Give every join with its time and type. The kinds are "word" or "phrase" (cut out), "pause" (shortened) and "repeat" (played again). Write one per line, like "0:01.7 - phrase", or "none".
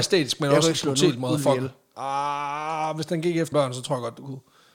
0:03.5 - word